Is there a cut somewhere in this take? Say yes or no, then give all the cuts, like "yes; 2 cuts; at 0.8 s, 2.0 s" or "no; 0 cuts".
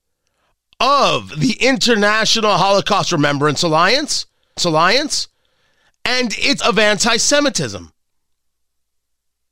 yes; 2 cuts; at 4.6 s, 6.6 s